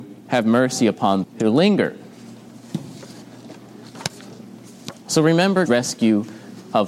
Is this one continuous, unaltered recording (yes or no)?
no